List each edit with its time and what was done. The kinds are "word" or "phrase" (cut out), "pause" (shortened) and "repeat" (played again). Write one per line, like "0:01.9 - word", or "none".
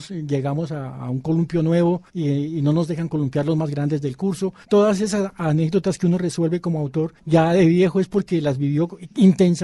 0:02.1 - pause
0:04.6 - pause
0:07.2 - pause